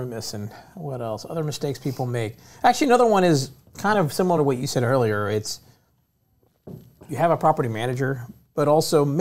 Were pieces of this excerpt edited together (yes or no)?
no